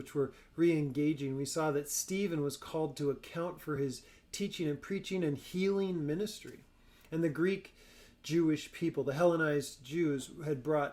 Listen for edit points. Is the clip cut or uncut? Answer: uncut